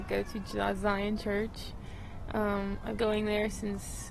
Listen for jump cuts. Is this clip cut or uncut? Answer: cut